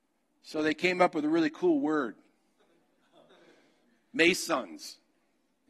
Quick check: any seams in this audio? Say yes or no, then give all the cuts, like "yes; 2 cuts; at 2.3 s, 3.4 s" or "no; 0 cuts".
no; 0 cuts